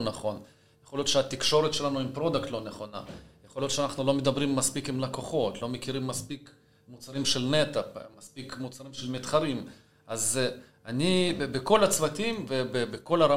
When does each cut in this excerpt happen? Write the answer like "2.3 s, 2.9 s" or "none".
none

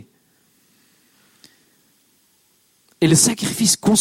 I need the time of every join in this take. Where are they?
none

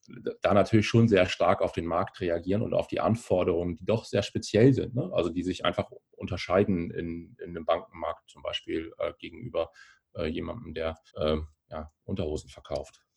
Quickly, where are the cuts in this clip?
11.1 s

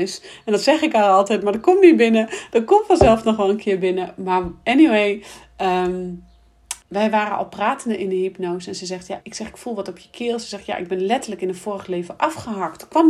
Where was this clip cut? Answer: 6.8 s, 9.2 s

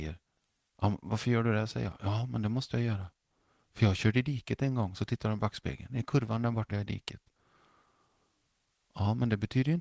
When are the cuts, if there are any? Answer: 6.7 s

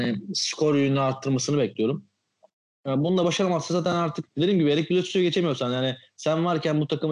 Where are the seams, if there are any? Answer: 4.3 s

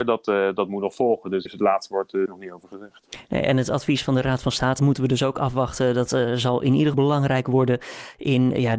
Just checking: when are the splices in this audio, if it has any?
1.5 s, 2.3 s, 4.8 s, 6.9 s

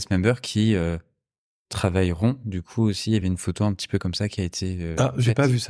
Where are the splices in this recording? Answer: none

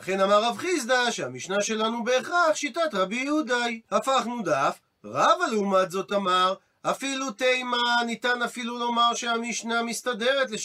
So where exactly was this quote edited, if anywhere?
3.8 s

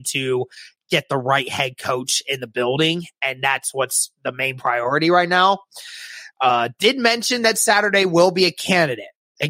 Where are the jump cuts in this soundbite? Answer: none

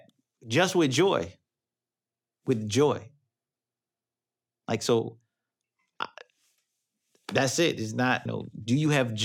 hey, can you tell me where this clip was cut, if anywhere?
8.3 s

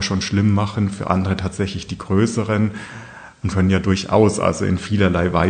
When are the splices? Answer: 3.5 s

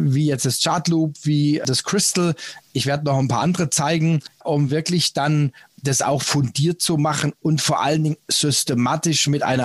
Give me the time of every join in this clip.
none

